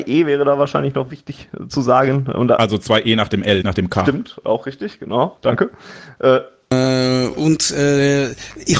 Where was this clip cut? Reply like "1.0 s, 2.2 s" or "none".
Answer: 3.6 s

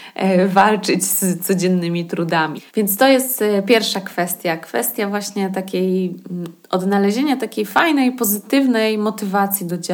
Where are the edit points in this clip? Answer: 2.7 s

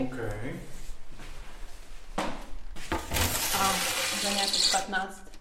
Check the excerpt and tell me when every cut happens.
none

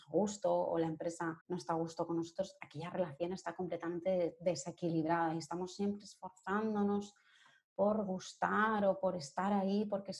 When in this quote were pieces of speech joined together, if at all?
1.4 s

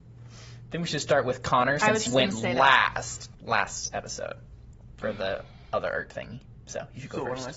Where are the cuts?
2.1 s

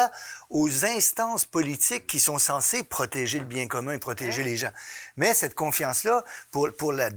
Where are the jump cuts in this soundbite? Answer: none

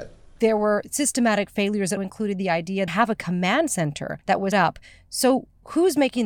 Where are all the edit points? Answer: 2.0 s, 2.9 s, 4.2 s, 4.5 s

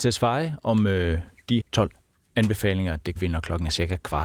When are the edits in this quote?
1.6 s, 3.2 s

